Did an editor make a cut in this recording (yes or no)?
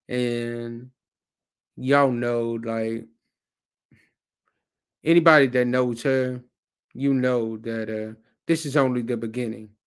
no